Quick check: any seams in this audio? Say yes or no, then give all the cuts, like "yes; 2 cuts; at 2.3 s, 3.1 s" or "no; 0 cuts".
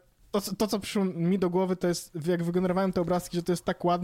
no; 0 cuts